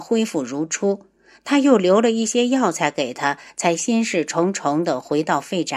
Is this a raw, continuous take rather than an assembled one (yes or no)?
yes